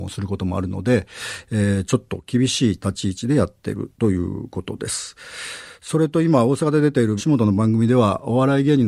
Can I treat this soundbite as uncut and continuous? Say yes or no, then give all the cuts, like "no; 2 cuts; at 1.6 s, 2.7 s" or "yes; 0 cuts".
no; 2 cuts; at 3.9 s, 7.2 s